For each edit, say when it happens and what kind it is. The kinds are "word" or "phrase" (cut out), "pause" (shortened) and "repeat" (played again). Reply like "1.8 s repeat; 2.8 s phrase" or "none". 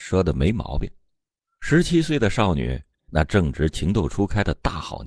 none